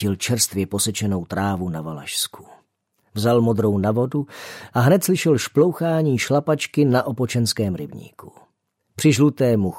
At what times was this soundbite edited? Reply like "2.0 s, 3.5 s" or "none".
none